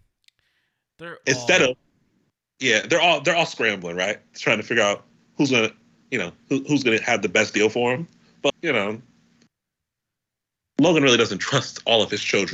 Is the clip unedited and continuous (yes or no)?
no